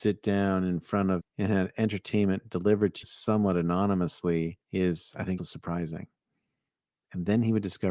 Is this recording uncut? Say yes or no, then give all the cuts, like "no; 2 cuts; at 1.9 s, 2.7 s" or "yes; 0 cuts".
no; 4 cuts; at 1.2 s, 3.0 s, 4.6 s, 5.4 s